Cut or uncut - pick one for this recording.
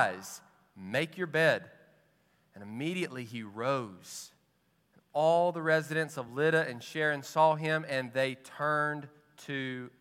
uncut